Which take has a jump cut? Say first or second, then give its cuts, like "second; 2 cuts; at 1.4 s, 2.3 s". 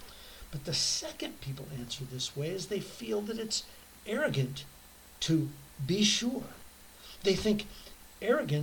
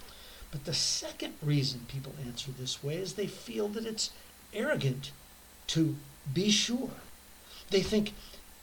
first; 1 cut; at 1.4 s